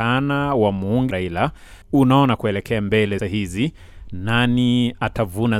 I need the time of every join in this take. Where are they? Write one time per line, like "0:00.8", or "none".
0:01.1
0:01.8
0:02.4
0:03.2